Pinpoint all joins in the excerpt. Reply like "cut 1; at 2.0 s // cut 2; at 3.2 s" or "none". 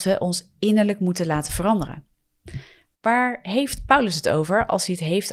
none